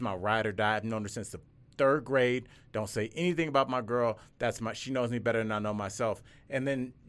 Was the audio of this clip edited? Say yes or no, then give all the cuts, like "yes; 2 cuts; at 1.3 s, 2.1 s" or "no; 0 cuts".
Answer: no; 0 cuts